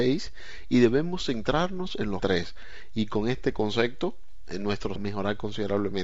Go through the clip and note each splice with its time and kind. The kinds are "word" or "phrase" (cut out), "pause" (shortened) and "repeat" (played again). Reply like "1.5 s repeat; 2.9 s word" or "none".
2.2 s word; 5.0 s word

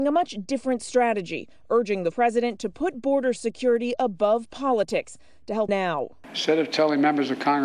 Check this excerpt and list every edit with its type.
2.1 s word; 5.7 s phrase

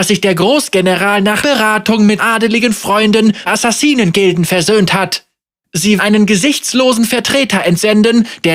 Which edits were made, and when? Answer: 1.4 s word; 2.2 s phrase; 3.5 s phrase; 6.0 s word

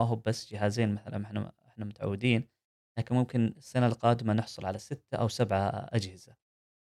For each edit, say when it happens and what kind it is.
none

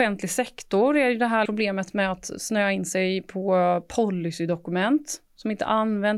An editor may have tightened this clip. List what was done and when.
1.5 s word

